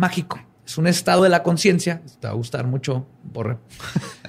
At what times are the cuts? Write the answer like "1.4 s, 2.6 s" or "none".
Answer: 1.2 s, 3.1 s